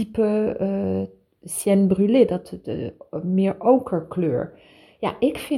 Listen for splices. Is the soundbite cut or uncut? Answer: uncut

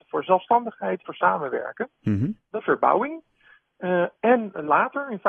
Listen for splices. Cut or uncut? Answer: cut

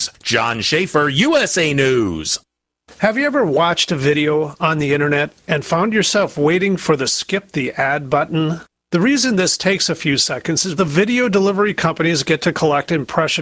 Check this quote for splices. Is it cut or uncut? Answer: cut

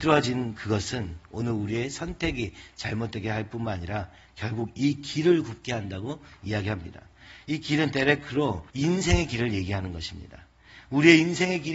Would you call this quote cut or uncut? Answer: cut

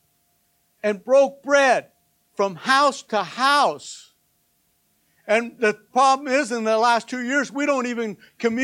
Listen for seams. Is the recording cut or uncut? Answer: uncut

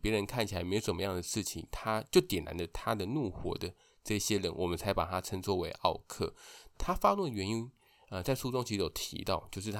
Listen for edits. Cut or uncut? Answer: uncut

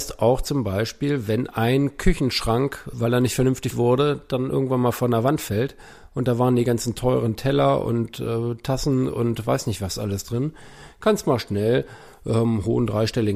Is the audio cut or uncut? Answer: cut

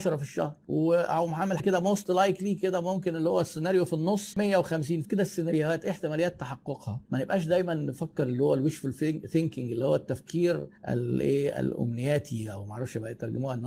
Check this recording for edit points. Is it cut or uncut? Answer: cut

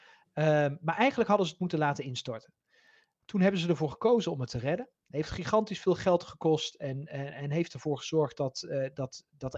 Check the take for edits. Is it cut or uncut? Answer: uncut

